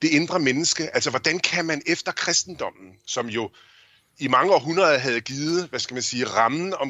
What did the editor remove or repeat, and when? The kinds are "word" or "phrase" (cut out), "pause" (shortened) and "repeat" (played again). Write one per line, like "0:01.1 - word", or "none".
none

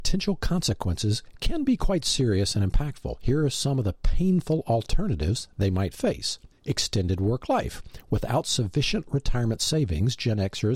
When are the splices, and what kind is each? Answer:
0:06.6 - pause

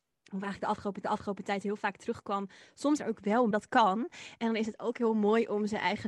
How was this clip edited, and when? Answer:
0:01.0 - repeat
0:03.0 - phrase
0:03.5 - phrase

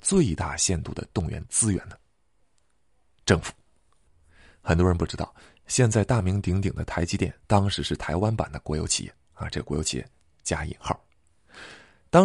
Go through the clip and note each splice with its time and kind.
0:07.4 - pause

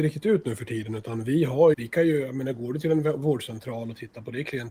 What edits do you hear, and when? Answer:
0:01.7 - word

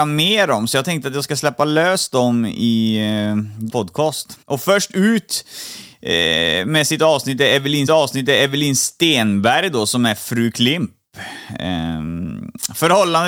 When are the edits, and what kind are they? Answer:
0:03.7 - word
0:04.4 - pause
0:07.9 - repeat

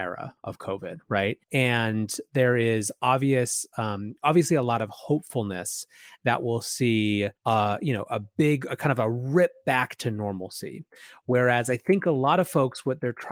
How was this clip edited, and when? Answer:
0:01.4 - pause
0:07.4 - pause

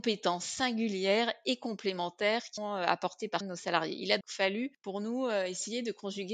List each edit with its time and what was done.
0:02.6 - word
0:03.4 - word
0:04.2 - word

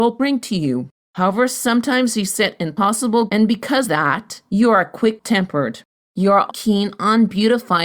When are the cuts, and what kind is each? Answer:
0:03.3 - word
0:03.8 - word
0:06.5 - word

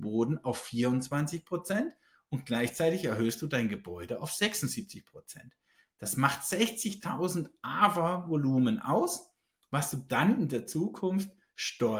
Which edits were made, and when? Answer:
none

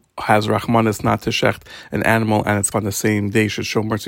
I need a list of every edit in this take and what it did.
0:02.7 - word

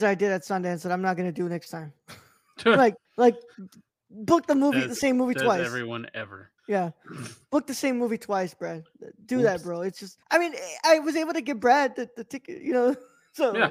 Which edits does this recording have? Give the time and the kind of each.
0:03.0 - pause
0:06.6 - pause
0:10.2 - pause

